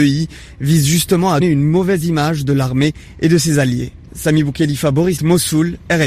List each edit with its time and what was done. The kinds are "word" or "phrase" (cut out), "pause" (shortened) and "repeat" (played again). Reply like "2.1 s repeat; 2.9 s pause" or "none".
1.4 s word; 5.2 s word